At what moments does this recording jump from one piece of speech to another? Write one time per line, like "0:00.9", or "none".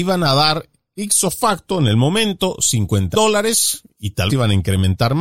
0:03.1
0:04.3